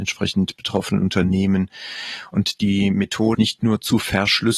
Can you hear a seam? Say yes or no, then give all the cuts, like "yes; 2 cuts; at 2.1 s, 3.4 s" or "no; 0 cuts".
yes; 1 cut; at 3.3 s